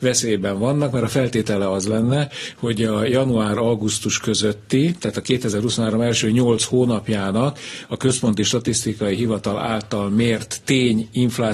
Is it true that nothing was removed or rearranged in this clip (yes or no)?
yes